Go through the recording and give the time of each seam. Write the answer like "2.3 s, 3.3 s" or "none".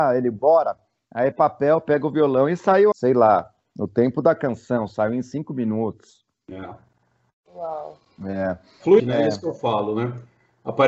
1.3 s, 2.9 s, 9.0 s

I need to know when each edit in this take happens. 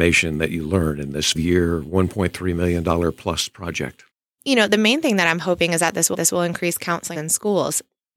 1.3 s, 4.1 s, 6.1 s, 7.2 s

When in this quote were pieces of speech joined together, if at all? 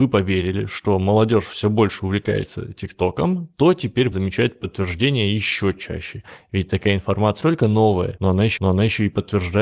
4.1 s, 7.4 s, 8.6 s

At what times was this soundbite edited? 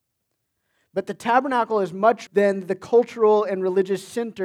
2.3 s

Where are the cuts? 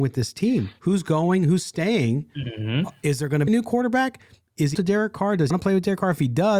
3.5 s, 4.7 s, 5.5 s

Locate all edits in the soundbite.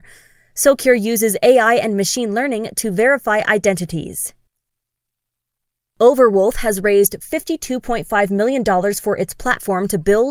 none

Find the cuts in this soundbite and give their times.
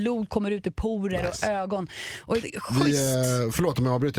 2.4 s

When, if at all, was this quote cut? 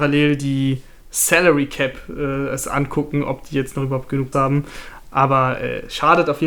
4.3 s

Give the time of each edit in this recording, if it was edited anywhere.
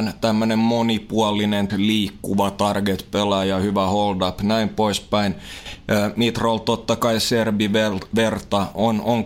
1.7 s

